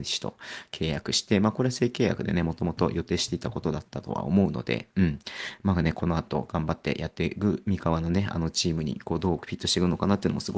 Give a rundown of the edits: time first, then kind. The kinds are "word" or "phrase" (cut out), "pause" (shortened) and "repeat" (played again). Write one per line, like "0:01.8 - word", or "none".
none